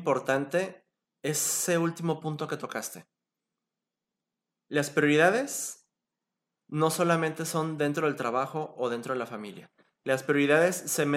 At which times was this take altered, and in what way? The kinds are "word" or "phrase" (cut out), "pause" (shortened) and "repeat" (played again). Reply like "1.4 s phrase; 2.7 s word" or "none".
none